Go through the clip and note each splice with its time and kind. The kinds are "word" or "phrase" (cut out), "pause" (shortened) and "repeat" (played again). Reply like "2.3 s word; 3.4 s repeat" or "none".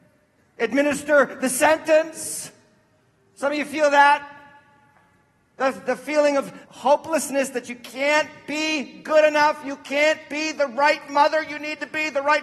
6.6 s pause